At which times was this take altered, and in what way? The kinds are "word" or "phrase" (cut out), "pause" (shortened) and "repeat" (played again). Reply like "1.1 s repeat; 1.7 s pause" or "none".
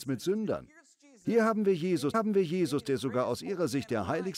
2.1 s repeat